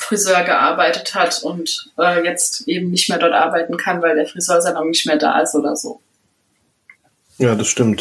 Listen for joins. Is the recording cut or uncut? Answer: uncut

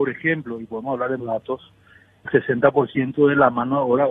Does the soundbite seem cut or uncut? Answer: cut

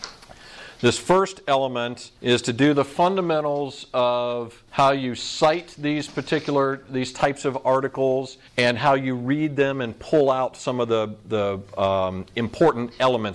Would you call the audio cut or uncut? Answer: cut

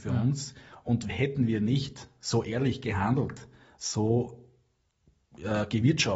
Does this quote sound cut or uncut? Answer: uncut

